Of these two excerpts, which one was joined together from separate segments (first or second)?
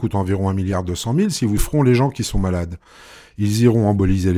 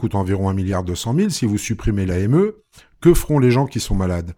first